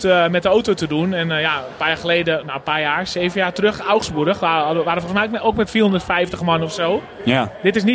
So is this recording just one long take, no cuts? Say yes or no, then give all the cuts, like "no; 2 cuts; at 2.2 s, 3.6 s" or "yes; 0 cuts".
yes; 0 cuts